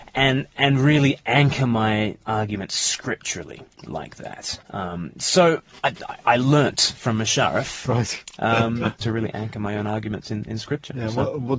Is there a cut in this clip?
no; 0 cuts

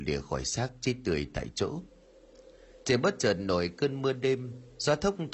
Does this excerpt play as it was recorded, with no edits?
yes; 0 cuts

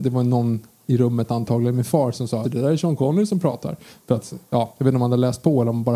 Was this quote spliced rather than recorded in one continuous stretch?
yes; 1 cut; at 2.4 s

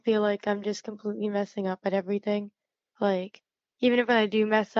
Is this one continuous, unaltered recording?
yes; 0 cuts

